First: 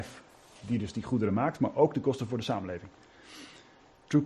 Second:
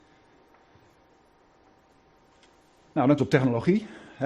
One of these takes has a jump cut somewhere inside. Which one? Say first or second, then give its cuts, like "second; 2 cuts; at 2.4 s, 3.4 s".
second; 1 cut; at 3.2 s